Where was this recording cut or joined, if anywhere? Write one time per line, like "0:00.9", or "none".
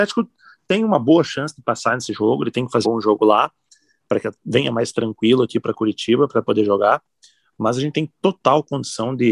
0:02.8